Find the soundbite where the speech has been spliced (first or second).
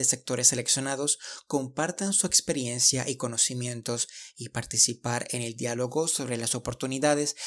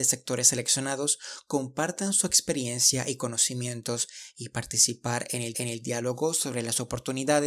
second